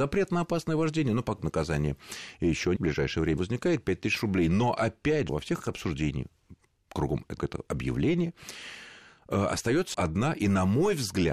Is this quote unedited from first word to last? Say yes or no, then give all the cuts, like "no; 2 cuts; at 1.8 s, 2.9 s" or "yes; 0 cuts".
no; 7 cuts; at 1.4 s, 2.8 s, 3.4 s, 5.3 s, 5.6 s, 7.4 s, 9.9 s